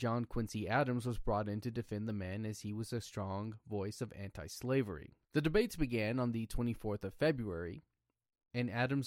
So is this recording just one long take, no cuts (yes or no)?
no